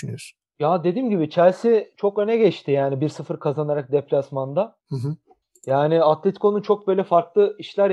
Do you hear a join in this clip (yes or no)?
yes